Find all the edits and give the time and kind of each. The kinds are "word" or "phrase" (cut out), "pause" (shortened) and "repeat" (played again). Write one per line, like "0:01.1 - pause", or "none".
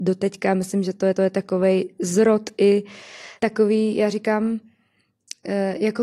0:01.1 - repeat
0:03.4 - pause